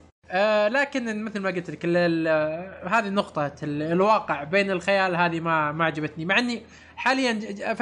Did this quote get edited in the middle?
no; 0 cuts

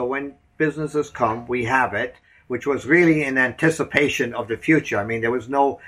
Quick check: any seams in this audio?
no; 0 cuts

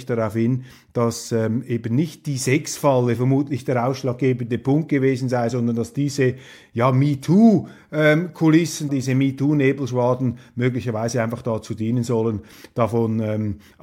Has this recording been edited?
yes; 1 cut; at 8.9 s

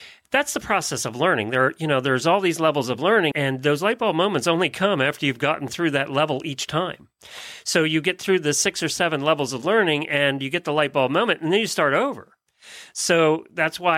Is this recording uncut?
no; 1 cut; at 3.3 s

